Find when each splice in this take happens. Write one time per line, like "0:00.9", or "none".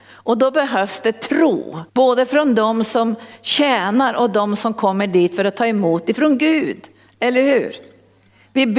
0:01.9